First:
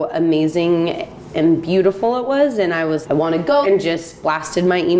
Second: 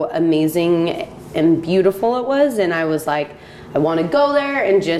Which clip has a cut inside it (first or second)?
first